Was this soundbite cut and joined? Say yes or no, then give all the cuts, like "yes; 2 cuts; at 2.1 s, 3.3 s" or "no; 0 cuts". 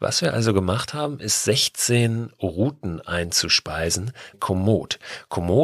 yes; 1 cut; at 4.3 s